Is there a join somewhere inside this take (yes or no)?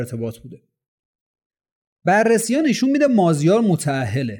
no